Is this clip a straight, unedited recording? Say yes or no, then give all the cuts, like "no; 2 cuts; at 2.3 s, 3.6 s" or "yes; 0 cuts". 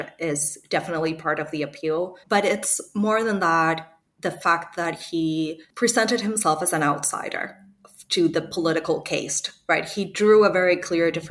no; 2 cuts; at 2.2 s, 5.7 s